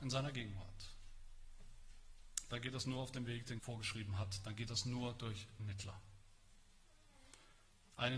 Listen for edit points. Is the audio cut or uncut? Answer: cut